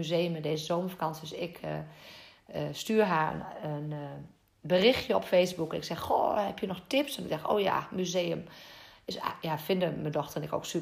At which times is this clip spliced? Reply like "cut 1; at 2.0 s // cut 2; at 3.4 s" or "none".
none